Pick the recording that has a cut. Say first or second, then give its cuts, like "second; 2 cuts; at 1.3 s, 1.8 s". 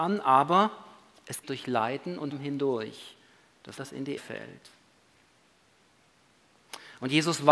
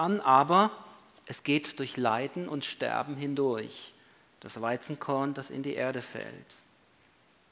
first; 4 cuts; at 1.4 s, 2.3 s, 3.8 s, 4.2 s